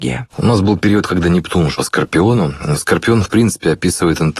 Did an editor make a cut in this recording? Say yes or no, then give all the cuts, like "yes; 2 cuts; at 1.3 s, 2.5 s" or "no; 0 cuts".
yes; 1 cut; at 1.7 s